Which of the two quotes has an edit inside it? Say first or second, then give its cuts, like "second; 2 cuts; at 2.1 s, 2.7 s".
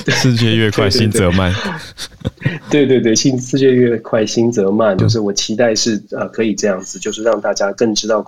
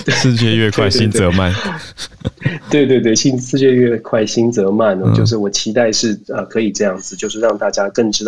first; 1 cut; at 5.0 s